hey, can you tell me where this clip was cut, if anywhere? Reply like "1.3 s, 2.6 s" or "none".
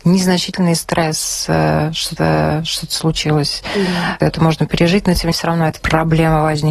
2.2 s, 5.3 s, 5.8 s